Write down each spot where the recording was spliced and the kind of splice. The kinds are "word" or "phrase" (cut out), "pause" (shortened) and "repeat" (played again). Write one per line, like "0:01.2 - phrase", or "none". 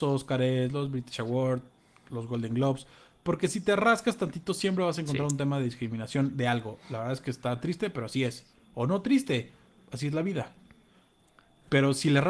none